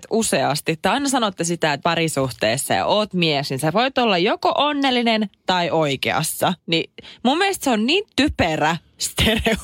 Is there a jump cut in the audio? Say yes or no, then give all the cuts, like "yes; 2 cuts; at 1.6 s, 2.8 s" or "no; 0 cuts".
yes; 3 cuts; at 1.8 s, 6.6 s, 8.1 s